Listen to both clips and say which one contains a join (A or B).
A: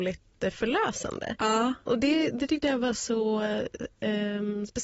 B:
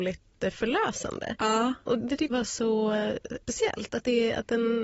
B